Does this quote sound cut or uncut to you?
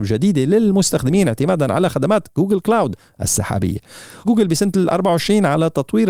cut